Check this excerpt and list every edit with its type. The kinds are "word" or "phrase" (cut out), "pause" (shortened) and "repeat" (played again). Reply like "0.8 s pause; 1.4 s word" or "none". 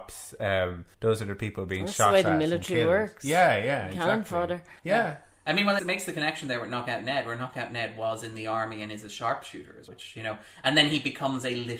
0.9 s pause; 4.8 s pause; 5.8 s phrase; 9.9 s word